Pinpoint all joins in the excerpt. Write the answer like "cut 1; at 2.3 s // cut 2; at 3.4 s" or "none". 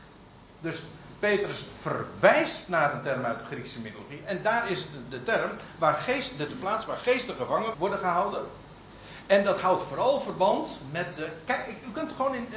cut 1; at 6.5 s // cut 2; at 7.7 s